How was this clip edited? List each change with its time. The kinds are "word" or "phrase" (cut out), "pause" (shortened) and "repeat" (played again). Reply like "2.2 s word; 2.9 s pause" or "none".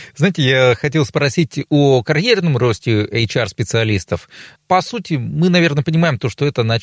4.5 s word

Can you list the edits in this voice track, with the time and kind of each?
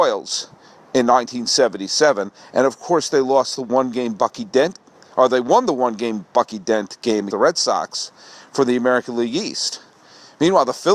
7.3 s word

